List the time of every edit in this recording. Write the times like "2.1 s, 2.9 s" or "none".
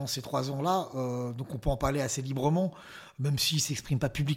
none